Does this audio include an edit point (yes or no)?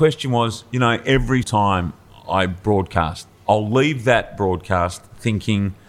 yes